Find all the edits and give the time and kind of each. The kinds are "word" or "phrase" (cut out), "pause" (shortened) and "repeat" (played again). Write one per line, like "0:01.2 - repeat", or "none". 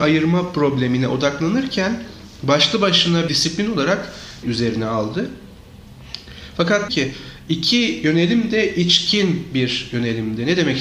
0:03.3 - word
0:04.4 - phrase
0:06.9 - phrase